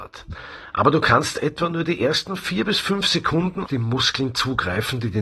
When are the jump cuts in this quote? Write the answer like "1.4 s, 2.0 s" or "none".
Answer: 3.7 s